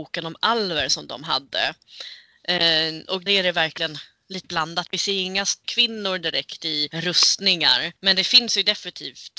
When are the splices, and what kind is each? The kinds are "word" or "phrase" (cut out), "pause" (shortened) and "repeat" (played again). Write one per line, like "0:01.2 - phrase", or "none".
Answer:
0:03.3 - word
0:04.4 - word
0:05.6 - word